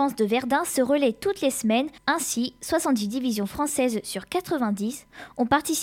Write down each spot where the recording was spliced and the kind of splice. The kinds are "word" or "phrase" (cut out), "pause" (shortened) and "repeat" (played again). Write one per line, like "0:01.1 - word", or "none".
0:02.0 - pause